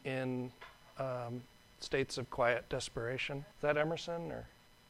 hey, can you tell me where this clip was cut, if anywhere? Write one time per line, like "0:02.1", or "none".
0:03.5